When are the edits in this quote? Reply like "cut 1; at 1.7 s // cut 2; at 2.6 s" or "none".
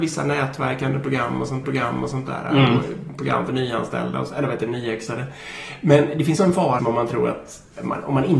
cut 1; at 1.6 s // cut 2; at 6.4 s // cut 3; at 6.8 s